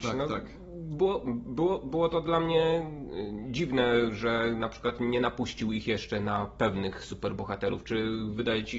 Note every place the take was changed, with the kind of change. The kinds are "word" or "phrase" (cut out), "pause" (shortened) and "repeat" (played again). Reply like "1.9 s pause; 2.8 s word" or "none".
none